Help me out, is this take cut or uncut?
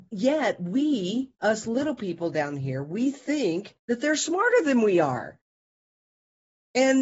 cut